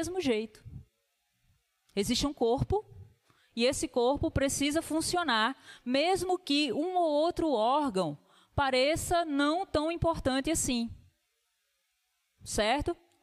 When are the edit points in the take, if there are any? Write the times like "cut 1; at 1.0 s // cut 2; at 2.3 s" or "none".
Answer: none